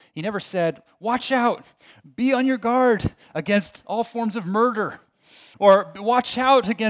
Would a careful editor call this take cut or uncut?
cut